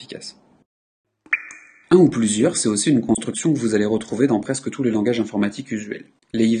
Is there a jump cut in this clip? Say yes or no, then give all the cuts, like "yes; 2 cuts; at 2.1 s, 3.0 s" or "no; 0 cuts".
no; 0 cuts